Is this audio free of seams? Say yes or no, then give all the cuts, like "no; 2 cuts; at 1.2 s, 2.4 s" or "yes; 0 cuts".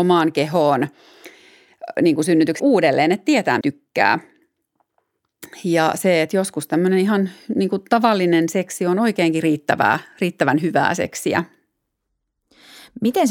no; 2 cuts; at 2.6 s, 3.6 s